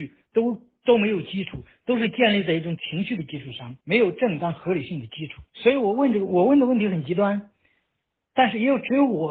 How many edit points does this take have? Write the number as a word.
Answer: two